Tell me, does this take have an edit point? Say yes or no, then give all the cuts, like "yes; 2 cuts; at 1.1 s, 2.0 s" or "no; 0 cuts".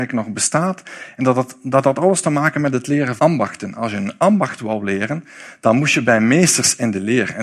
yes; 1 cut; at 3.2 s